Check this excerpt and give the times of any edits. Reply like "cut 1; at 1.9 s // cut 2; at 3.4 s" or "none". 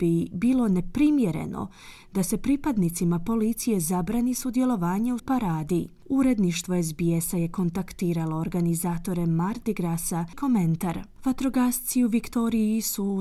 cut 1; at 5.2 s // cut 2; at 10.3 s